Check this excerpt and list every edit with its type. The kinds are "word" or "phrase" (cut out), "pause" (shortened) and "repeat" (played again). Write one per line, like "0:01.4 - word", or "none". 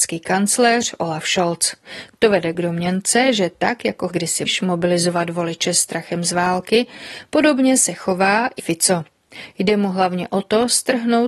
0:04.1 - word
0:04.5 - word
0:08.6 - word